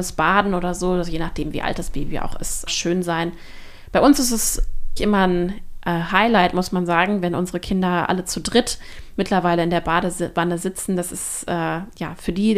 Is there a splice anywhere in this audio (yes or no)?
yes